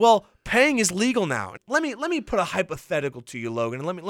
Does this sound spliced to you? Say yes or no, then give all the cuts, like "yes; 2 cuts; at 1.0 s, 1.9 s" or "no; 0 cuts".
yes; 1 cut; at 1.6 s